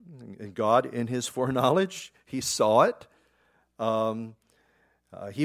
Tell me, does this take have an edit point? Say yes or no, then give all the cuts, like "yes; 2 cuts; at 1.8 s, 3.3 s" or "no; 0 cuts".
no; 0 cuts